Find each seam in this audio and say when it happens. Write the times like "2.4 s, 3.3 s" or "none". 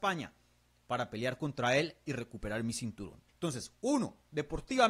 3.3 s